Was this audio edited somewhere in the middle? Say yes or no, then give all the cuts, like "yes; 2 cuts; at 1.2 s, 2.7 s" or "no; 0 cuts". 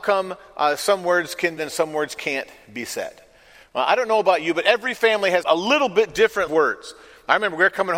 yes; 3 cuts; at 1.6 s, 5.4 s, 6.5 s